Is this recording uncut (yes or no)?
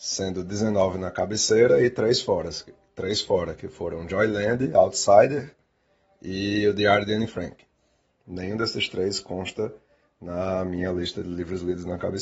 yes